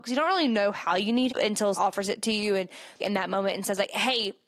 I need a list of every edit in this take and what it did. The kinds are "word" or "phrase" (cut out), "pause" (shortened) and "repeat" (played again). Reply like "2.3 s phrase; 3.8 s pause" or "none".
1.3 s word; 1.7 s word; 3.0 s word